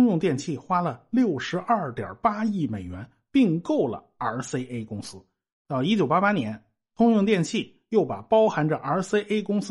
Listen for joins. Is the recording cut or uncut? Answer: uncut